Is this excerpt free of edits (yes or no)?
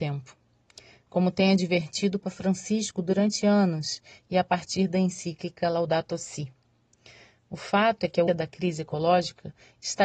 no